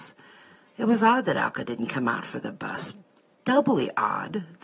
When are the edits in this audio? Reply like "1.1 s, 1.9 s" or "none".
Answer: none